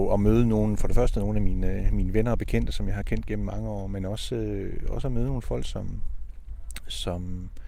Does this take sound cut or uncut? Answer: uncut